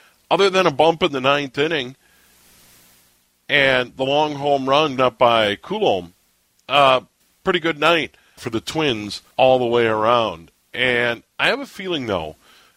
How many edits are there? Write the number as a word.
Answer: five